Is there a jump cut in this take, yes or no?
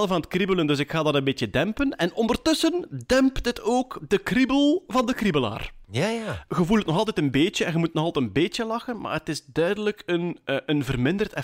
no